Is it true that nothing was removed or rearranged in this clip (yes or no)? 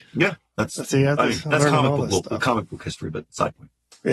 yes